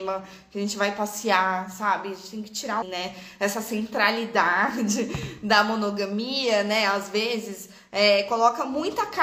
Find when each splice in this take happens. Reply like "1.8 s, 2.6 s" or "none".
2.8 s